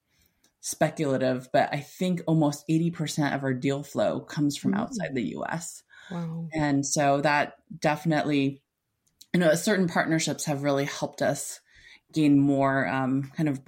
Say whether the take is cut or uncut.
uncut